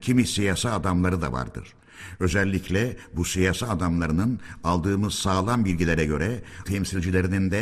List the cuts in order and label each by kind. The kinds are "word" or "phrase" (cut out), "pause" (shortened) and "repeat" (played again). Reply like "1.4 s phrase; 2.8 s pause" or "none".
6.7 s word